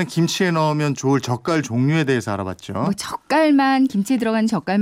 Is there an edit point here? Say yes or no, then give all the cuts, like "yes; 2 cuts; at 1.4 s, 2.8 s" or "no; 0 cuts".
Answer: no; 0 cuts